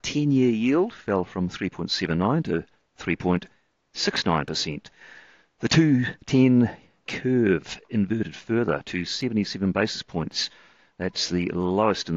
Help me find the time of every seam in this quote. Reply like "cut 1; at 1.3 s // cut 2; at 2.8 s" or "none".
cut 1; at 7.1 s